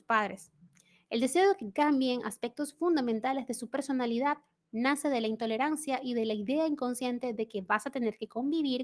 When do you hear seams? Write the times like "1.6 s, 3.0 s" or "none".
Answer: none